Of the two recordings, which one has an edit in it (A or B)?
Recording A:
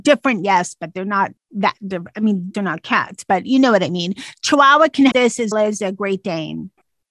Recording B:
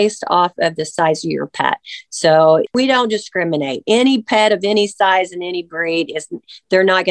A